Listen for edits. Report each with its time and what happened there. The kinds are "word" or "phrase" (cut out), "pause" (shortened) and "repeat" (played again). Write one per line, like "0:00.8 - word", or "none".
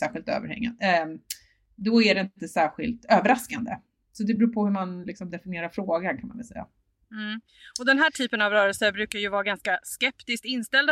none